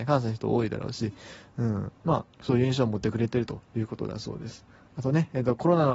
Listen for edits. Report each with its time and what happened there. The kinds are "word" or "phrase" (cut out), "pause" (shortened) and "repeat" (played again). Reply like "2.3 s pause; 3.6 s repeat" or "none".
2.0 s pause; 2.3 s pause; 3.6 s pause